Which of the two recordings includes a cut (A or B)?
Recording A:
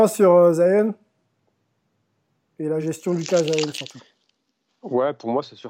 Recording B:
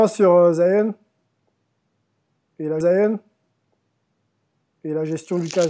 B